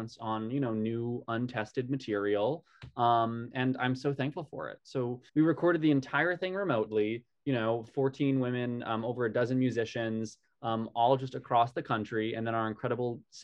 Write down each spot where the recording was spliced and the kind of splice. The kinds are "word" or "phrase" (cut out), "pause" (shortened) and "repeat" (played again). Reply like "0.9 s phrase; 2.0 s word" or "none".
5.3 s pause